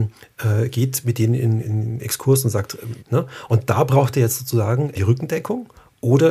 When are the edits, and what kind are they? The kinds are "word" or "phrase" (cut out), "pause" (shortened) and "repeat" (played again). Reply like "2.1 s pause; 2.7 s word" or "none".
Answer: 1.6 s word; 3.0 s word; 4.9 s word